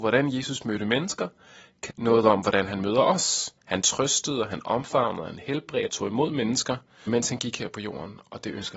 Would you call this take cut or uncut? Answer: cut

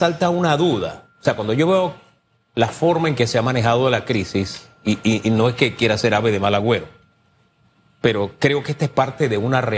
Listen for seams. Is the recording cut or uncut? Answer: uncut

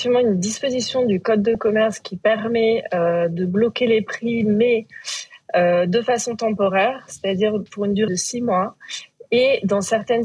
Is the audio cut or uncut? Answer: cut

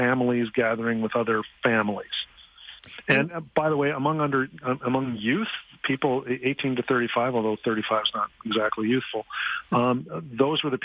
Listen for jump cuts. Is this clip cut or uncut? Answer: cut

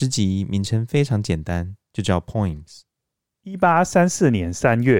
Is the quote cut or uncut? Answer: uncut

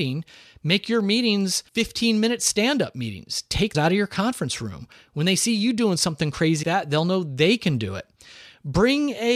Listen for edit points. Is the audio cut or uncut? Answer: cut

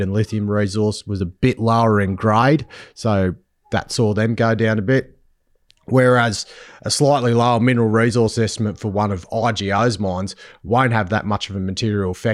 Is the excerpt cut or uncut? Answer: uncut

